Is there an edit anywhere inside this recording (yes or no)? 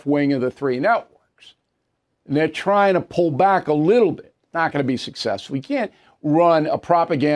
no